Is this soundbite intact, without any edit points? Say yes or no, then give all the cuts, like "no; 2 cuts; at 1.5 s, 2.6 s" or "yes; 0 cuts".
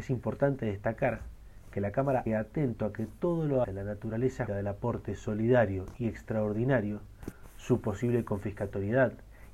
no; 3 cuts; at 2.3 s, 3.6 s, 4.5 s